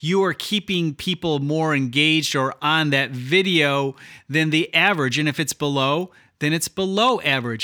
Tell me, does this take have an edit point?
no; 0 cuts

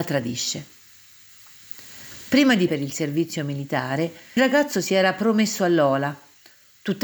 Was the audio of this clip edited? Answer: yes; 2 cuts; at 2.7 s, 4.4 s

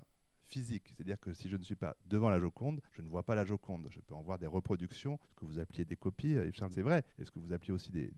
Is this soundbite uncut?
no; 5 cuts; at 2.9 s, 5.2 s, 5.9 s, 6.7 s, 7.1 s

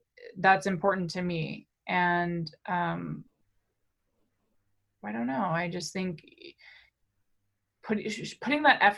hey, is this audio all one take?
yes; 0 cuts

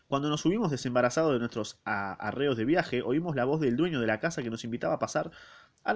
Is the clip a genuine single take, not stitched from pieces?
yes; 0 cuts

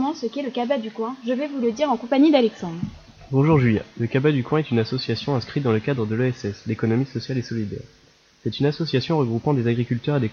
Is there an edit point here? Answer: no; 0 cuts

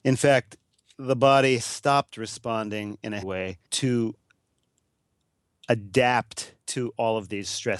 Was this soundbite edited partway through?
yes; 4 cuts; at 1.6 s, 3.2 s, 3.6 s, 6.6 s

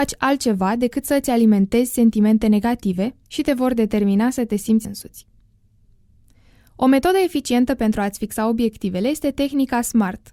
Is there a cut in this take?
yes; 2 cuts; at 3.2 s, 4.8 s

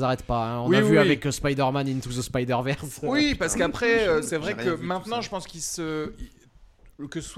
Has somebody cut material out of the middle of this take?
no; 0 cuts

